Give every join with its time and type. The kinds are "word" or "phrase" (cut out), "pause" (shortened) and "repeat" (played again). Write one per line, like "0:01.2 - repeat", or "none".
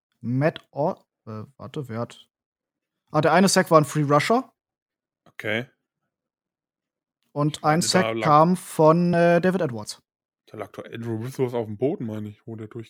none